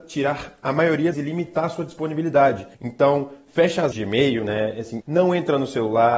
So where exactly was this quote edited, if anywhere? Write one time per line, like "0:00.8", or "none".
0:01.1
0:02.7
0:03.9
0:05.0